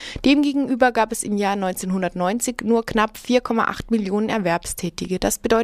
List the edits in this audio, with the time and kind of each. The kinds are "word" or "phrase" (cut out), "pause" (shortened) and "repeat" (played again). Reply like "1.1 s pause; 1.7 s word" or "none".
none